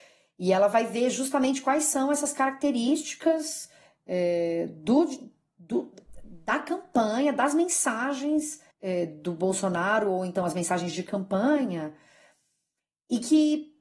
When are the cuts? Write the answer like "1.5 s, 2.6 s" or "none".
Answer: 8.7 s